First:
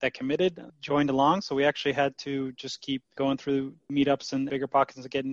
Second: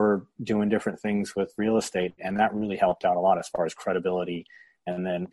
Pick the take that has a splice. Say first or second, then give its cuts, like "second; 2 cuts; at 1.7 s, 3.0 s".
first; 1 cut; at 3.1 s